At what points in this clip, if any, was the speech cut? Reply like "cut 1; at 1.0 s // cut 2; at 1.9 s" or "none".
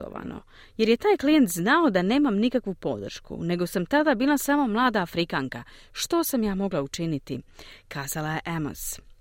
none